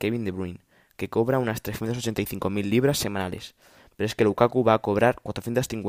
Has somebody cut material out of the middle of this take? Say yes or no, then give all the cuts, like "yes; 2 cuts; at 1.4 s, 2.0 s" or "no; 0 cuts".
no; 0 cuts